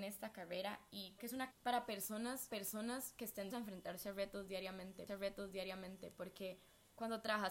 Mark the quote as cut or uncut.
cut